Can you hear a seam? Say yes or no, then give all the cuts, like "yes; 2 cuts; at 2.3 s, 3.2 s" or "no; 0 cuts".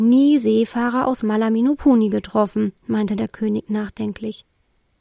no; 0 cuts